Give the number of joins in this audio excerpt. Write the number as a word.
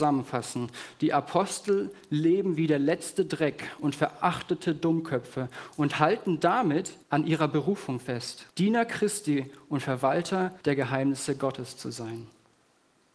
three